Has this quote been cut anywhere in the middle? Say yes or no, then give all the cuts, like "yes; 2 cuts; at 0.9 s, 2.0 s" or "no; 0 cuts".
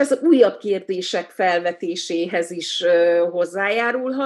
no; 0 cuts